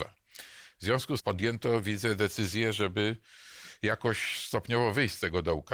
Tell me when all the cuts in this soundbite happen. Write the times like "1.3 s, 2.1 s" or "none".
1.2 s